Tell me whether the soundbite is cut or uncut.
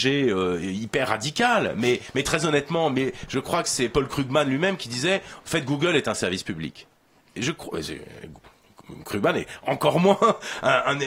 uncut